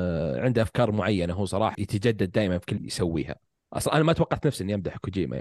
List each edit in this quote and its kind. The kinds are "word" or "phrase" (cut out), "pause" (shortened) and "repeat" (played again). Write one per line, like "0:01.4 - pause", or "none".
0:01.7 - word
0:02.8 - word